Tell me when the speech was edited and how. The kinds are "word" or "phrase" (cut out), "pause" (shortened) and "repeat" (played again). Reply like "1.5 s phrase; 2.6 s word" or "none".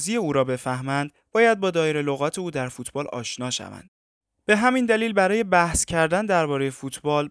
none